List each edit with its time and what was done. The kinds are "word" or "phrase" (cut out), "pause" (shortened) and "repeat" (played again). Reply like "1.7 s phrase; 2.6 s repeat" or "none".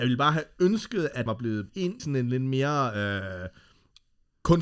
1.3 s word; 1.7 s word; 2.0 s word